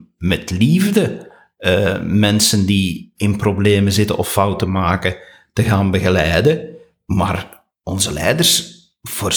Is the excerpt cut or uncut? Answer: uncut